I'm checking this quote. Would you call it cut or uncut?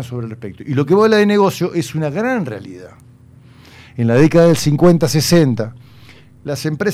uncut